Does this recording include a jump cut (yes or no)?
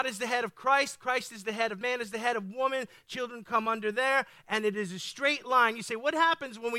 yes